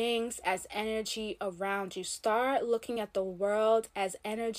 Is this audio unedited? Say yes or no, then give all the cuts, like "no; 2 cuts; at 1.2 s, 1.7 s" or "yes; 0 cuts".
yes; 0 cuts